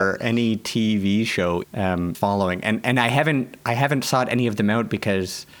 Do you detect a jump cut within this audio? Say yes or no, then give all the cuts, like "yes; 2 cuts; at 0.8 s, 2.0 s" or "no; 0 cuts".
yes; 2 cuts; at 1.6 s, 2.1 s